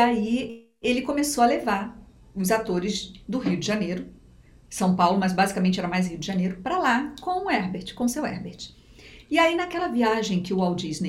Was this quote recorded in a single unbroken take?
yes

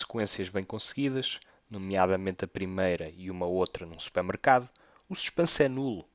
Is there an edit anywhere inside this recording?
no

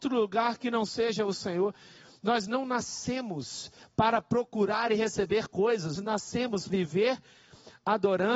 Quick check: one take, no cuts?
no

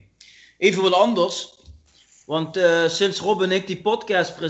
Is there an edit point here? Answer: no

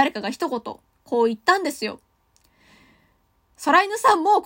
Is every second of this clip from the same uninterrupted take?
yes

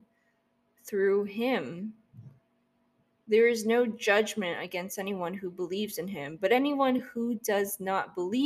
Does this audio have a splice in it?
no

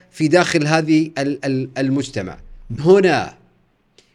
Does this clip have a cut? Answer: yes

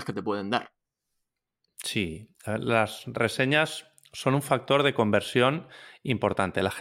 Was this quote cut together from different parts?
no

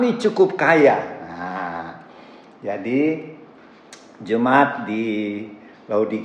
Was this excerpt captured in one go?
yes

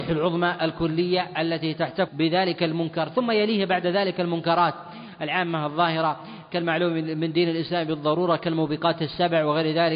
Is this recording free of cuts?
no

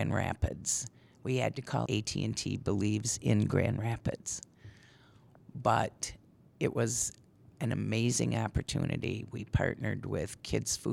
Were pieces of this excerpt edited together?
yes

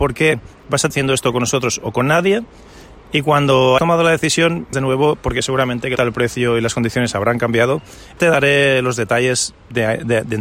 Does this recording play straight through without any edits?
no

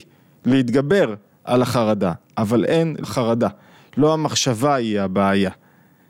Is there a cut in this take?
yes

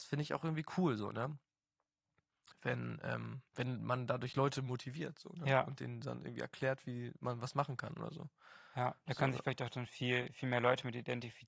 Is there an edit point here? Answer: yes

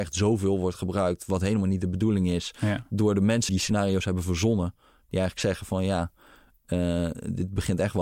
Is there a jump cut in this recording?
yes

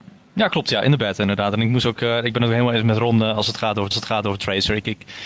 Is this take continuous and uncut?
no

